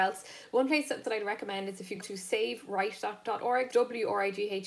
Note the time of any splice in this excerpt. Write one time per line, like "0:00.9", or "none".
0:01.0
0:02.0
0:03.7